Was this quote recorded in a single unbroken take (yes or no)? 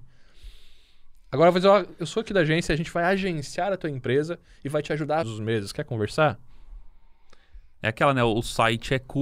no